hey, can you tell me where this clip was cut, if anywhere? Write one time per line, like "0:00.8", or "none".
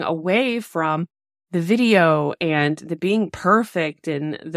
none